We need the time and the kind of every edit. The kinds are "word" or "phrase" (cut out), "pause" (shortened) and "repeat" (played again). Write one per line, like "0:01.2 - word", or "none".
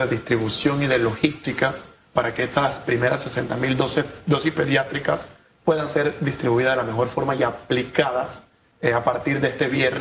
none